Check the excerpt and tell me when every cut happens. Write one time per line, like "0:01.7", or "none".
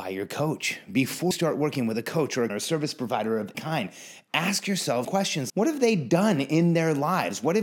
0:01.3
0:02.5
0:03.5
0:05.0
0:05.5